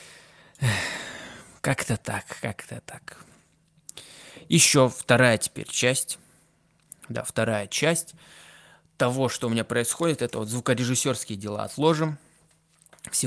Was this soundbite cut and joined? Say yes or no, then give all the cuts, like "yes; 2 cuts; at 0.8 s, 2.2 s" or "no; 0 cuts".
no; 0 cuts